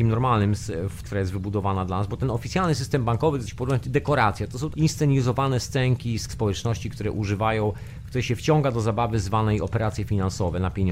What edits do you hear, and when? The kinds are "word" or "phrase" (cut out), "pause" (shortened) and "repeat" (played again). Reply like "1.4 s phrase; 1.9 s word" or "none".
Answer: 1.0 s phrase; 3.5 s word; 3.8 s word; 4.7 s word; 6.3 s phrase